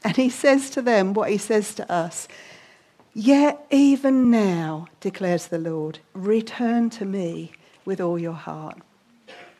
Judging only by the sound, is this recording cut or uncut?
uncut